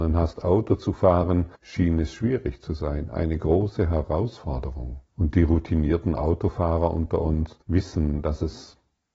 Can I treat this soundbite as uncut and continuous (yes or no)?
no